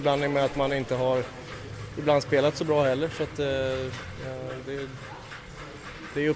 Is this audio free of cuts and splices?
yes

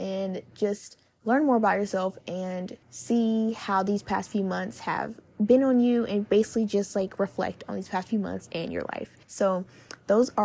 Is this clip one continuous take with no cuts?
no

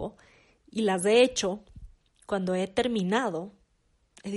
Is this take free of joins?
no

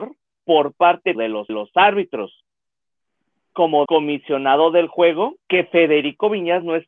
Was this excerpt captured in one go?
no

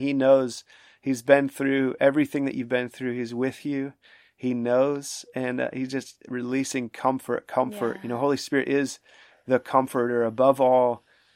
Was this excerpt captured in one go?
yes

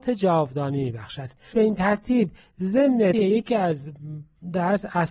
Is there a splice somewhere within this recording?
yes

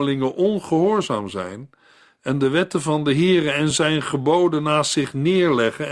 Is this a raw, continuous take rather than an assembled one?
yes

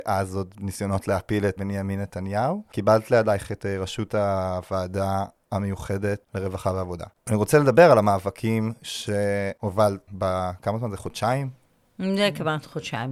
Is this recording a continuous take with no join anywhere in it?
no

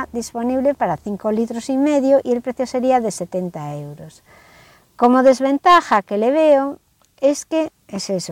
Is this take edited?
no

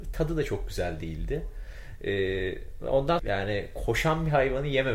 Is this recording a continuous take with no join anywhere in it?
no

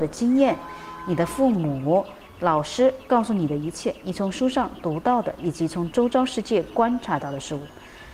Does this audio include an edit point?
no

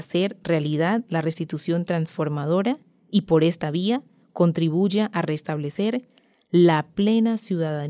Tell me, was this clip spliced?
no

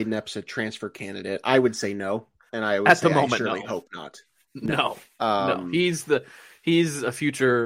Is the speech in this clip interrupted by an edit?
no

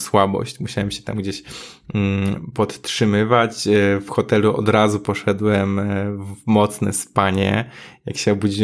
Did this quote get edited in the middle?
no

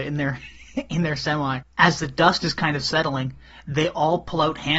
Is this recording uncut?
no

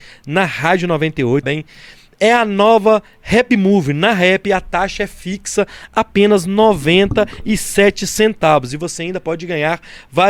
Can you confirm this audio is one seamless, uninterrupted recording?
no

